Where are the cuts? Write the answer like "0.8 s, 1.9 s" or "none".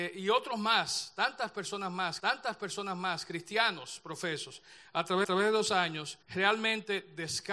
2.2 s, 5.2 s, 6.2 s